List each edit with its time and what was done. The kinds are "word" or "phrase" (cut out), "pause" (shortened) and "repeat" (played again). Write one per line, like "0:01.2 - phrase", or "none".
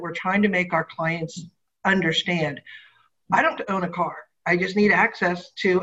0:03.6 - word